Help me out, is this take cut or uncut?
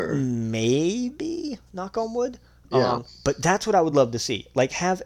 uncut